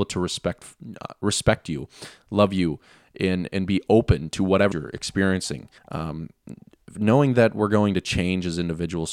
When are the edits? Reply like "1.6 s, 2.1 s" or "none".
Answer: 4.7 s, 5.8 s